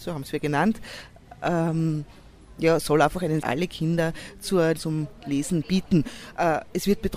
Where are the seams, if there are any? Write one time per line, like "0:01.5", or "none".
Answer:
0:03.4
0:04.8